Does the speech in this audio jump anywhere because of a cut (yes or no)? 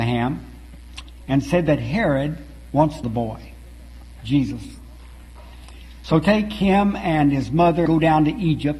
yes